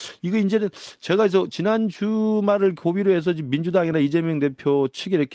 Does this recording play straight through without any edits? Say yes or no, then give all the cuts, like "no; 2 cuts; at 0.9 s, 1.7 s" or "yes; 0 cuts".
yes; 0 cuts